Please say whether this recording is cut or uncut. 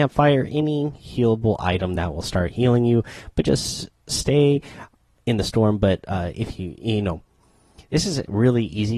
uncut